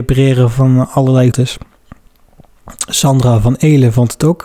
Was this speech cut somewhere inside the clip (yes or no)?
yes